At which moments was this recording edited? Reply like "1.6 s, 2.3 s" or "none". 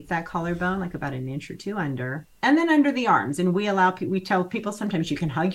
2.3 s